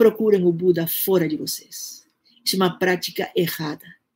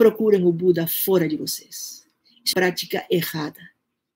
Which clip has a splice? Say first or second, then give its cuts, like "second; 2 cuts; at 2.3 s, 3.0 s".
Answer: second; 1 cut; at 2.5 s